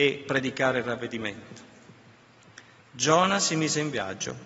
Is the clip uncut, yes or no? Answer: yes